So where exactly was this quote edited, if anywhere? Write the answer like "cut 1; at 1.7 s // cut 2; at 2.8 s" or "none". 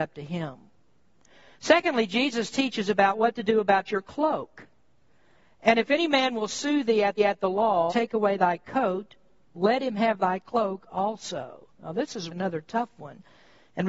cut 1; at 7.2 s // cut 2; at 7.9 s // cut 3; at 11.7 s // cut 4; at 12.3 s

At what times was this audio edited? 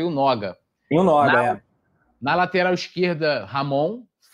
none

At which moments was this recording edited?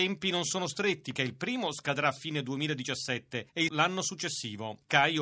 cut 1; at 1.2 s // cut 2; at 3.7 s

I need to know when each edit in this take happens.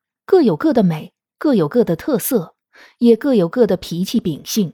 none

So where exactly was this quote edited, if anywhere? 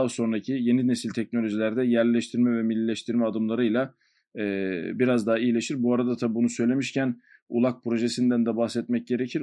none

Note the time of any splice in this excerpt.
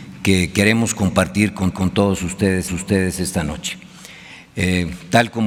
cut 1; at 1.7 s // cut 2; at 2.7 s

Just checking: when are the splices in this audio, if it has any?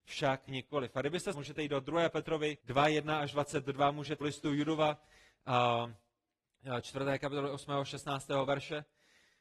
cut 1; at 1.3 s // cut 2; at 2.6 s // cut 3; at 4.2 s

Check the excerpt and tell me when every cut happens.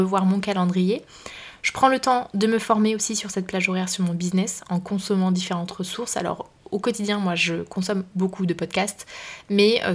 cut 1; at 8.1 s

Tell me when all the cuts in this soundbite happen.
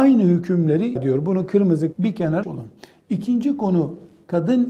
cut 1; at 1.0 s // cut 2; at 1.9 s // cut 3; at 2.4 s

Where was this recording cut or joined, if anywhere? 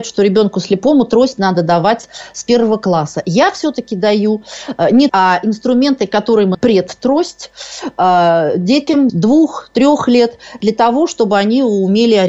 cut 1; at 5.1 s // cut 2; at 6.5 s // cut 3; at 9.1 s

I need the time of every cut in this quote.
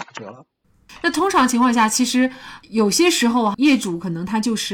cut 1; at 3.5 s

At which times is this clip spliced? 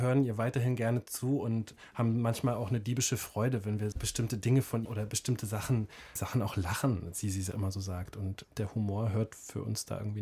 cut 1; at 3.9 s // cut 2; at 4.8 s // cut 3; at 6.2 s // cut 4; at 7.5 s

